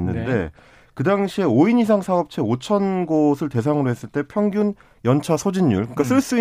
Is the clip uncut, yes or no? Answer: yes